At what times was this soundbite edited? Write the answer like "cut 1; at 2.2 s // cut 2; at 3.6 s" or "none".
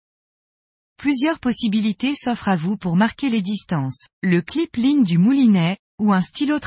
cut 1; at 4.1 s